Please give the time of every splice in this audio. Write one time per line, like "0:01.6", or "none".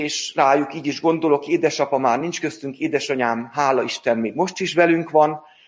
none